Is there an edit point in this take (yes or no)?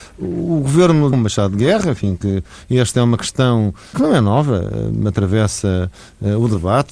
yes